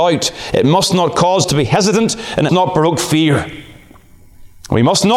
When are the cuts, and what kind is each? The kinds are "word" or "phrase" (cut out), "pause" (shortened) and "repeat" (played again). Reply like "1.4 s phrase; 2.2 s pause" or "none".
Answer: 1.4 s word; 2.5 s word